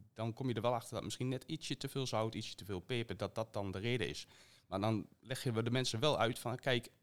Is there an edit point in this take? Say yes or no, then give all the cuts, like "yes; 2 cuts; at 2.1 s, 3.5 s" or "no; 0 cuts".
no; 0 cuts